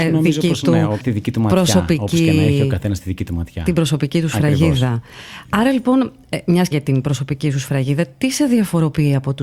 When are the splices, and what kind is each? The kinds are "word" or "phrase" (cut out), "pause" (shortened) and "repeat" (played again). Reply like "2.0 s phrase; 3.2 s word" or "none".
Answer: 1.0 s word; 6.7 s word